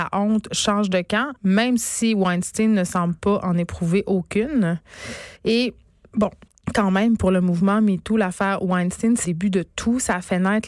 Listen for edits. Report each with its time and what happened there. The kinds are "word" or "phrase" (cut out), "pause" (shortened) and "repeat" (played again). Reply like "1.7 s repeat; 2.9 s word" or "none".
1.4 s pause; 5.4 s pause; 6.5 s pause; 9.2 s word